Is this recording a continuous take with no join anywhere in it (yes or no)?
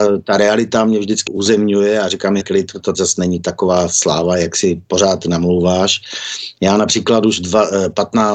no